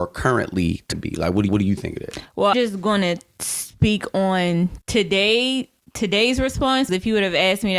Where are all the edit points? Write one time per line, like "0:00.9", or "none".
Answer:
0:00.9
0:01.5
0:02.5
0:04.8
0:06.9

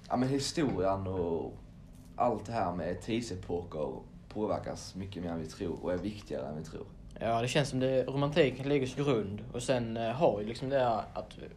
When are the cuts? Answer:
0:09.0

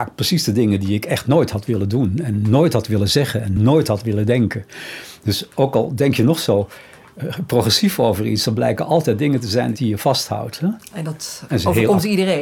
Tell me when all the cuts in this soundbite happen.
none

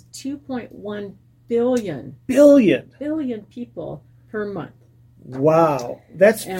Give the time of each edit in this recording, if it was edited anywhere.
none

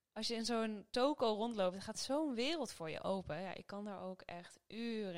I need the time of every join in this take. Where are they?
none

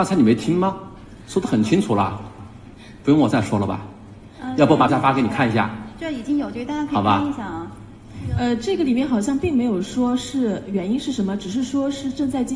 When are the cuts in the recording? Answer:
0:04.9

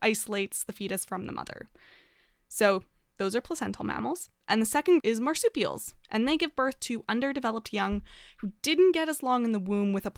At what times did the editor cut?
0:05.0

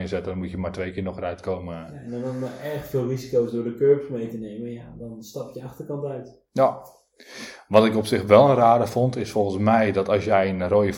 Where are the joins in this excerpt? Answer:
none

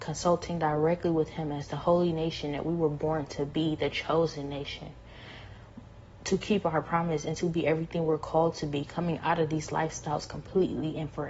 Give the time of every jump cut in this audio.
none

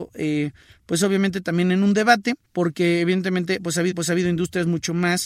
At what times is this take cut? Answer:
0:02.4
0:03.9

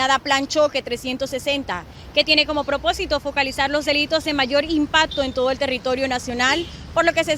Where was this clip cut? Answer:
none

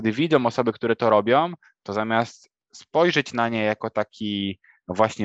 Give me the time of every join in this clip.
none

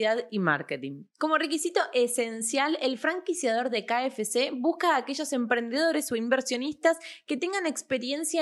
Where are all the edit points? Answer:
none

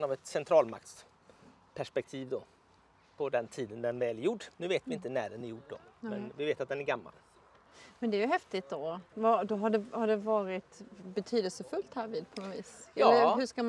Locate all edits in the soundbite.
none

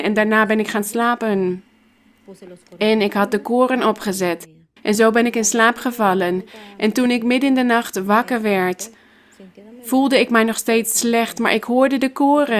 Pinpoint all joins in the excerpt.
none

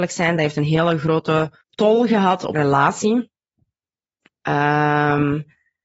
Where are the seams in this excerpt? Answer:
0:01.6
0:02.5

